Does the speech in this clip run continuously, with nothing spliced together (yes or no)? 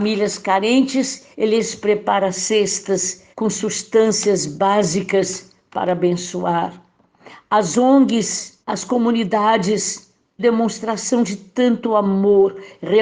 no